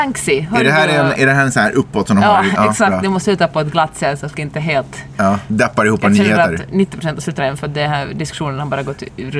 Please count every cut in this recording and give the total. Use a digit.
2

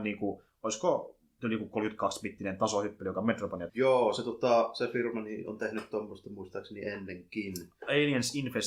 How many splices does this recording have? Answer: 1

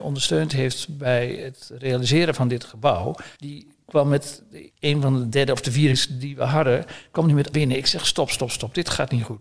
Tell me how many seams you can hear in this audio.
4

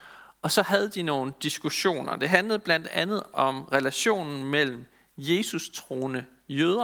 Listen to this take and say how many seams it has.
0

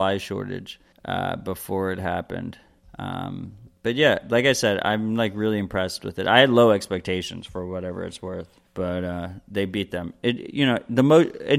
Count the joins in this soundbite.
3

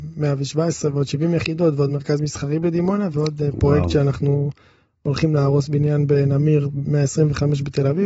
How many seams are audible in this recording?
0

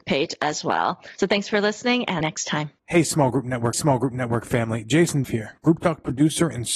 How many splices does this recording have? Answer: 4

